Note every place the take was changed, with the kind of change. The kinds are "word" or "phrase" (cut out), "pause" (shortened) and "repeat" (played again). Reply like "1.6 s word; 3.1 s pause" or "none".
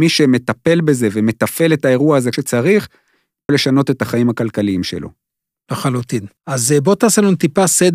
2.3 s word; 3.5 s word; 6.4 s pause